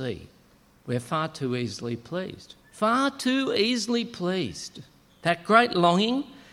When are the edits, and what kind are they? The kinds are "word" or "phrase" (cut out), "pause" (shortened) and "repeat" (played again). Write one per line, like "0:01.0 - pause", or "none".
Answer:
0:02.6 - pause
0:05.1 - pause